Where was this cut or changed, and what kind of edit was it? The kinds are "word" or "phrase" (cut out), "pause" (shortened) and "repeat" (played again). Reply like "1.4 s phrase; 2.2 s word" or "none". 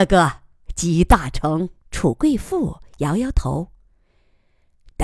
1.8 s pause